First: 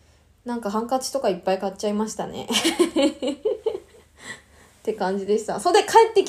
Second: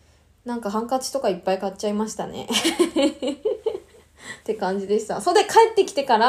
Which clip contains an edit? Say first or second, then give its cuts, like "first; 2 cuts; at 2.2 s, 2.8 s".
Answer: second; 1 cut; at 4.4 s